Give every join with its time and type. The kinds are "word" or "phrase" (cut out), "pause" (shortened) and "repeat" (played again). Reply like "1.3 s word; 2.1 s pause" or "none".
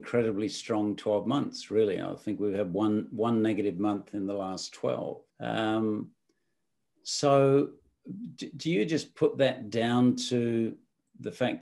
5.3 s pause